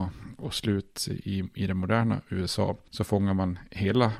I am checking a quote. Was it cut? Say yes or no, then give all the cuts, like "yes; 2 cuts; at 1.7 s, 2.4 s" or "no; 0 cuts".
no; 0 cuts